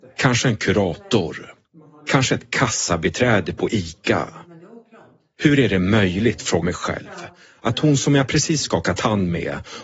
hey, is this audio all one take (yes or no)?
no